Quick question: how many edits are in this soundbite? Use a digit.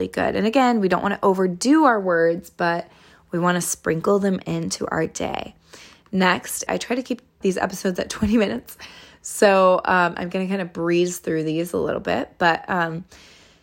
2